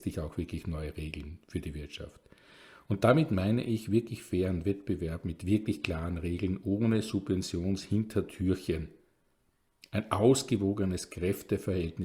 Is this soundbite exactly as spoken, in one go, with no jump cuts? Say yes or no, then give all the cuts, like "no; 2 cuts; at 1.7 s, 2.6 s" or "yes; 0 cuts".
yes; 0 cuts